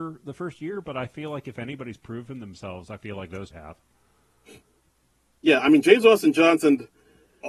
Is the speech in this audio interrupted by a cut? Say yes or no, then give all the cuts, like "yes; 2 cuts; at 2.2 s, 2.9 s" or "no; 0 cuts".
yes; 1 cut; at 3.5 s